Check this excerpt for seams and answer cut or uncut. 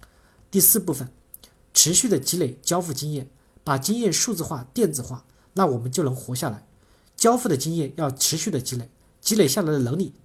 uncut